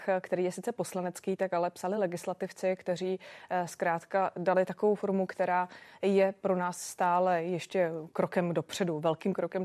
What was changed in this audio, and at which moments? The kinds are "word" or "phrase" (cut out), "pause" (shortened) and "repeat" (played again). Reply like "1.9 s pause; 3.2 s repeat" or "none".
none